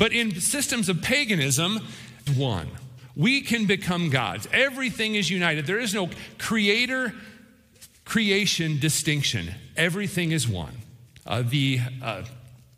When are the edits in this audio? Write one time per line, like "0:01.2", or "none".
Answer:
0:02.3
0:11.2